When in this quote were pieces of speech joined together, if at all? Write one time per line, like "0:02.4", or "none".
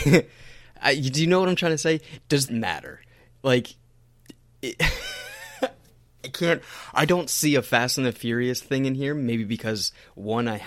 0:02.5